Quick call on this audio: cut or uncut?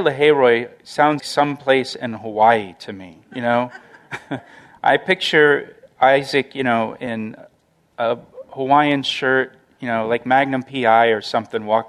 cut